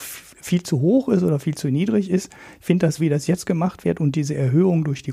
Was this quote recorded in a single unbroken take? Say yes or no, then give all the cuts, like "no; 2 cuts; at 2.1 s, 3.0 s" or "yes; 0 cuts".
no; 1 cut; at 3.0 s